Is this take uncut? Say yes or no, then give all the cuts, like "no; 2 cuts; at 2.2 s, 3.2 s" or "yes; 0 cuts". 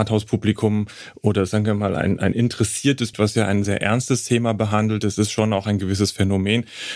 no; 2 cuts; at 3.1 s, 3.6 s